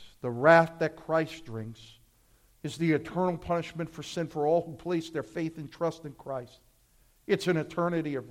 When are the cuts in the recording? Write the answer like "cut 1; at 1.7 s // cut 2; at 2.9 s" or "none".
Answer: none

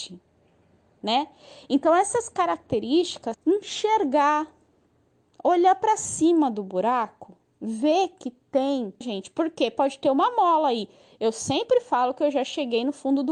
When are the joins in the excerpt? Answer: cut 1; at 3.3 s // cut 2; at 9.0 s

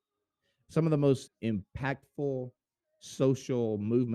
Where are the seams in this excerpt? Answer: cut 1; at 1.3 s

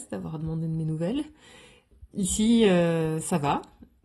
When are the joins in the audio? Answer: none

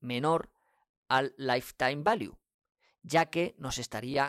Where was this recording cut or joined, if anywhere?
none

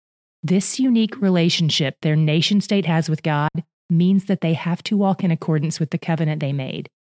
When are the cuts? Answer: none

